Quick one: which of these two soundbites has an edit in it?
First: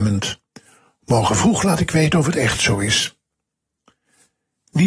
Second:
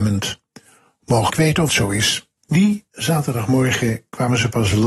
second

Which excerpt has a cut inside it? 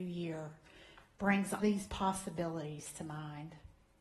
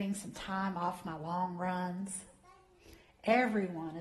first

